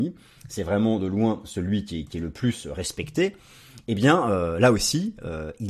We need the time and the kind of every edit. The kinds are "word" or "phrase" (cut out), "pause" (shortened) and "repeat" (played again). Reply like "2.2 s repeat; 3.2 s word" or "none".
none